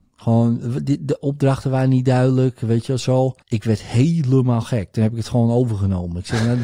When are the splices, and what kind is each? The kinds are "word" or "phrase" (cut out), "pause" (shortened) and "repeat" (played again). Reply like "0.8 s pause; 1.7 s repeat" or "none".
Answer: 3.4 s pause